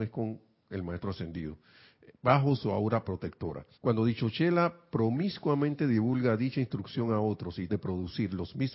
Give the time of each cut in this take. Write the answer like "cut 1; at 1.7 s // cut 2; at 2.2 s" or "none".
cut 1; at 3.7 s // cut 2; at 7.7 s